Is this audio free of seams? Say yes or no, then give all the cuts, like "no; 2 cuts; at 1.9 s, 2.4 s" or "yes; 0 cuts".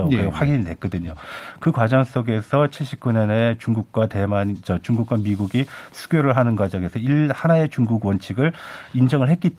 yes; 0 cuts